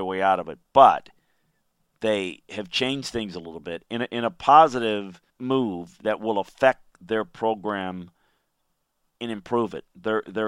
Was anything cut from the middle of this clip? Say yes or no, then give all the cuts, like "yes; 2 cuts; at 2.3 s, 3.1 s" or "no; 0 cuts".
yes; 1 cut; at 5.3 s